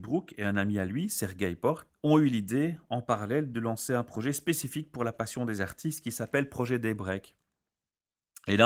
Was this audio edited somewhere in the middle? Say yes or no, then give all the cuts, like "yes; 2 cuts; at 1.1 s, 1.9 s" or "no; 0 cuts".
no; 0 cuts